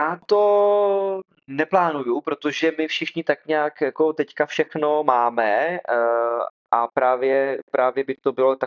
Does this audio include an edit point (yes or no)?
no